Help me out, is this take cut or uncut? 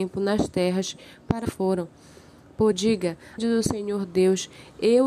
cut